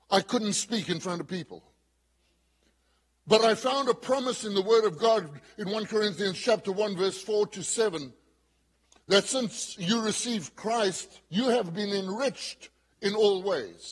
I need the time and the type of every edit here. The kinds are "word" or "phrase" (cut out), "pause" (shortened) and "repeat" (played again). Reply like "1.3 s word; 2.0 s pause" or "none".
11.3 s pause